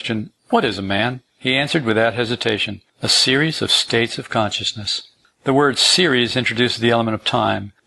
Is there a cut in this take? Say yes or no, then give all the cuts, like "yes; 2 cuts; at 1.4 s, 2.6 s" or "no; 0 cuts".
no; 0 cuts